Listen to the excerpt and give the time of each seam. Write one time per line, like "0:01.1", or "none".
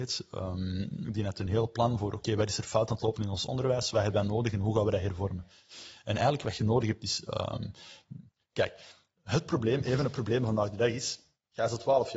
none